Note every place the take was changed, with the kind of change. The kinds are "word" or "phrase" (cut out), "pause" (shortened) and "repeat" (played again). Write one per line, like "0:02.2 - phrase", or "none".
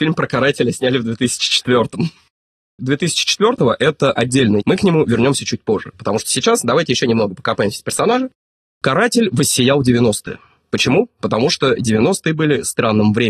0:02.8 - word
0:04.6 - word